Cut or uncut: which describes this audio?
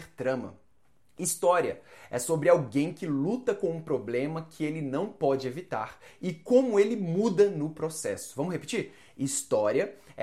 uncut